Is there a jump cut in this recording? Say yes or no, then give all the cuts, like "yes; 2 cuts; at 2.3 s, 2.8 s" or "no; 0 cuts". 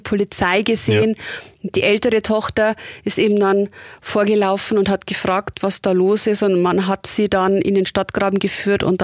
no; 0 cuts